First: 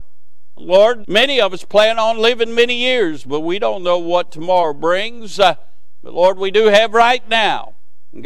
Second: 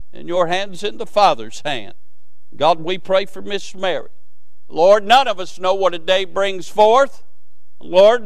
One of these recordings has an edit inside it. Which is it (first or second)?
first